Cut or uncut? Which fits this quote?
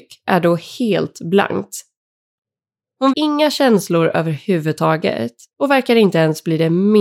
cut